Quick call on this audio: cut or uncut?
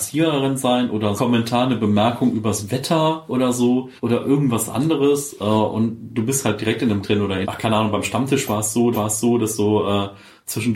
cut